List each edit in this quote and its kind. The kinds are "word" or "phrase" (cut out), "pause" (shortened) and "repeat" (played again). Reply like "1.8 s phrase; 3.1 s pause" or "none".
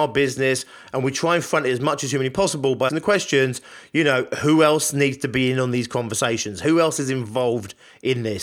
2.9 s word